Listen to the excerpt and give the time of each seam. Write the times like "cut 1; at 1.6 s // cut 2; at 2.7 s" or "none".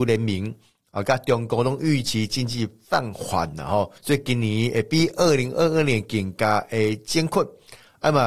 cut 1; at 4.0 s